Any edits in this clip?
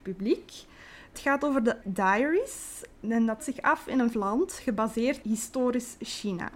yes; 5 cuts; at 1.1 s, 1.8 s, 3.4 s, 4.1 s, 5.2 s

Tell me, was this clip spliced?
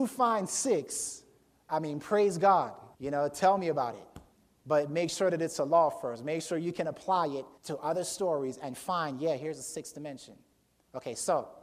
yes; 3 cuts; at 2.9 s, 4.3 s, 7.6 s

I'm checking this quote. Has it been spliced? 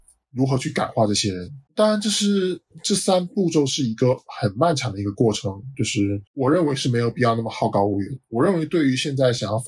yes; 2 cuts; at 1.7 s, 6.3 s

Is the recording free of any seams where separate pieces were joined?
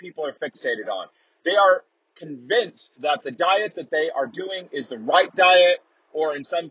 yes; 0 cuts

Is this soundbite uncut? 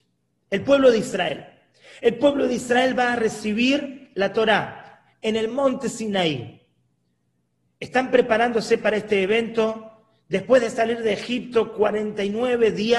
yes; 0 cuts

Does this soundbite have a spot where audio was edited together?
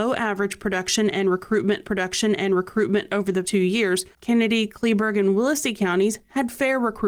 yes; 3 cuts; at 1.8 s, 3.4 s, 4.2 s

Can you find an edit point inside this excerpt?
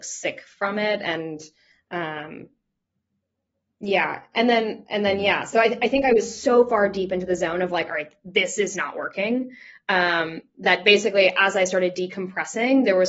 no; 0 cuts

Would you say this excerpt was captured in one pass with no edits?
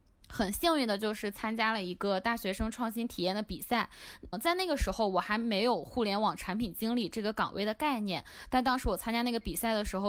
no; 1 cut; at 4.3 s

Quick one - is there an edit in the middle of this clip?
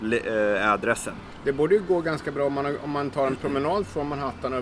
no; 0 cuts

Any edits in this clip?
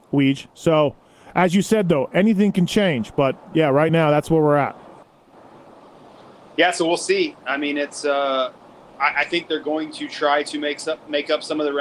no; 0 cuts

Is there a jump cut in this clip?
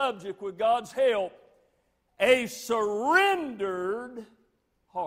no; 0 cuts

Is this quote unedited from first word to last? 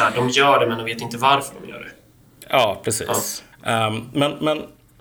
no; 1 cut; at 3.5 s

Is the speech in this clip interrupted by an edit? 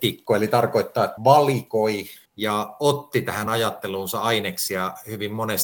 yes; 3 cuts; at 1.2 s, 2.2 s, 3.5 s

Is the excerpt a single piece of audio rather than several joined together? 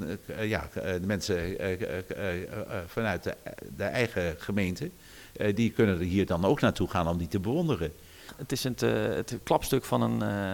yes; 0 cuts

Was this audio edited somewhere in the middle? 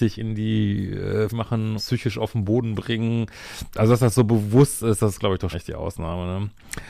yes; 3 cuts; at 1.3 s, 1.8 s, 5.5 s

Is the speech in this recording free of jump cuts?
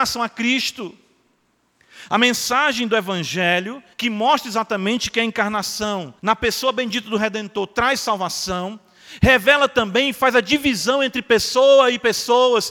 no; 2 cuts; at 3.9 s, 6.2 s

